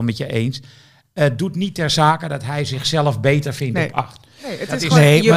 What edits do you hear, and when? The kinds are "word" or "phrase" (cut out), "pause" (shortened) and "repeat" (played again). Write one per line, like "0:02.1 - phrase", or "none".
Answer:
none